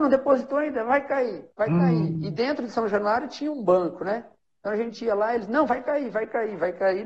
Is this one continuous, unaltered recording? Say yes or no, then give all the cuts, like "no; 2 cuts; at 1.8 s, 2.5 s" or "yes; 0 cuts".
yes; 0 cuts